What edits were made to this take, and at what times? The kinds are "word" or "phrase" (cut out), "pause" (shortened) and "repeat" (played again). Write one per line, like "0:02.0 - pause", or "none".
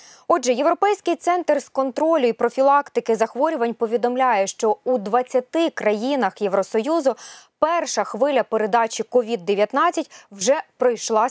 none